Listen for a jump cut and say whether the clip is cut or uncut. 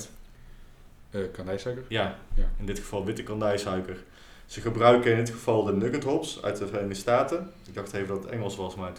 uncut